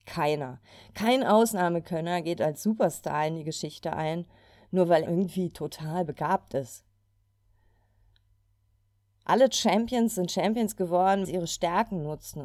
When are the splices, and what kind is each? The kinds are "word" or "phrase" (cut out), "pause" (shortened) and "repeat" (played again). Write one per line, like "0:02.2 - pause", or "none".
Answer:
0:05.1 - word
0:11.2 - word